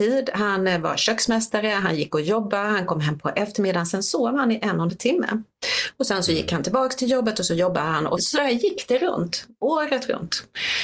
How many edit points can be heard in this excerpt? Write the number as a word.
two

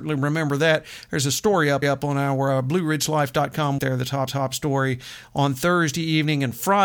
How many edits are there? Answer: three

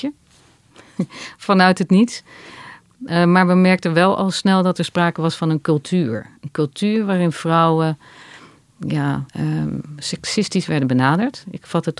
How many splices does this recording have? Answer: one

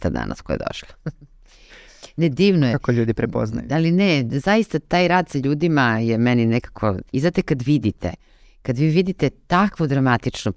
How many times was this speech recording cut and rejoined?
two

